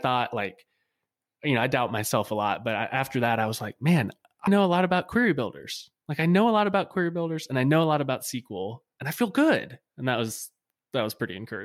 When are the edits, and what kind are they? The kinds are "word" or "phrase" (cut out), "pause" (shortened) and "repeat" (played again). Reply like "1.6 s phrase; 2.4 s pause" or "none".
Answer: 4.5 s word